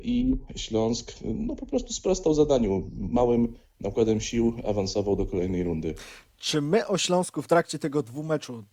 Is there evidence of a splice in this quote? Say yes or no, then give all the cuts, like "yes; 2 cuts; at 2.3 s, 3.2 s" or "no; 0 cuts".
no; 0 cuts